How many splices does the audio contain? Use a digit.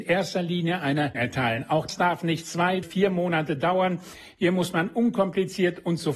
3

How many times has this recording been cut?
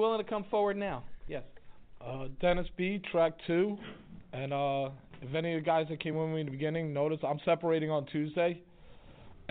0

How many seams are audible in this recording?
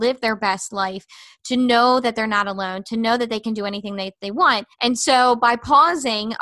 1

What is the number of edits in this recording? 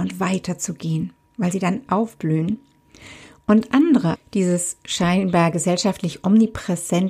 2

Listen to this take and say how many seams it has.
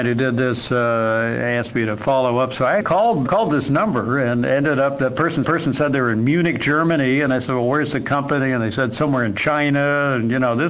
3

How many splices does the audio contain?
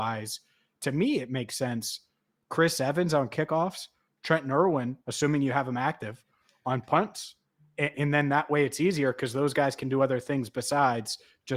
1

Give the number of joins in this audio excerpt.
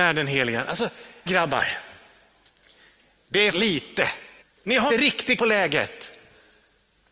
5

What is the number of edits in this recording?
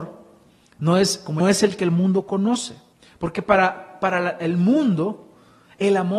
2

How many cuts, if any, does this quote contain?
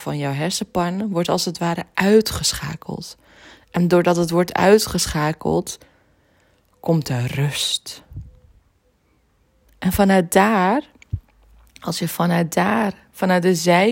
0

